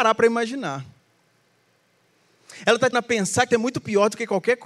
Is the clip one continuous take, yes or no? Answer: no